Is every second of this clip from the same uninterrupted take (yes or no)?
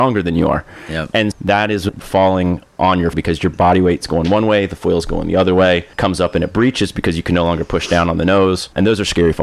no